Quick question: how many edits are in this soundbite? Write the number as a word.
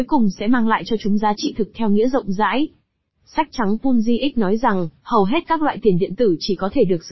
one